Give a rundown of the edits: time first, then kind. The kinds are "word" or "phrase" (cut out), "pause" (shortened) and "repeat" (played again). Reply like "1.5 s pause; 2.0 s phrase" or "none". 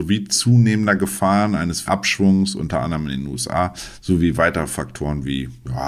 1.9 s word